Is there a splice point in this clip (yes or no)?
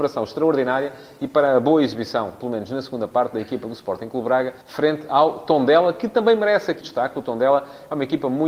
yes